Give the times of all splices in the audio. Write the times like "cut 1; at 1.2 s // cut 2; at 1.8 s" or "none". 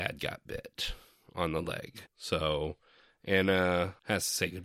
cut 1; at 2.1 s